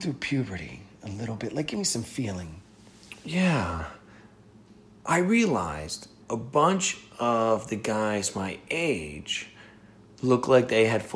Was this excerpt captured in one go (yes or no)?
no